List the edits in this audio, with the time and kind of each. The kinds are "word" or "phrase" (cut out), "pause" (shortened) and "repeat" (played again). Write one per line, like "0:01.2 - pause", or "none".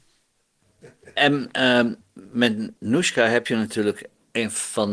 0:02.0 - pause